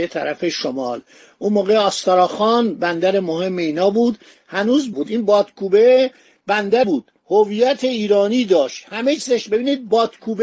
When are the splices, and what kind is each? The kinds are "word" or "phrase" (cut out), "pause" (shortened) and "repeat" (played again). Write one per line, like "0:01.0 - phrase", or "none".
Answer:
0:04.9 - phrase
0:06.8 - word
0:07.2 - pause